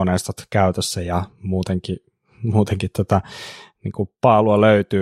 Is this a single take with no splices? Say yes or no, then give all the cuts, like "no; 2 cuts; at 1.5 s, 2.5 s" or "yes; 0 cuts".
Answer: yes; 0 cuts